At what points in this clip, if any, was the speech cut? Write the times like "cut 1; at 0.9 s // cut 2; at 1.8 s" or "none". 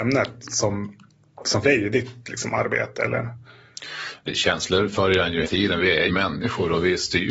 cut 1; at 1.6 s // cut 2; at 4.3 s // cut 3; at 5.4 s // cut 4; at 6.1 s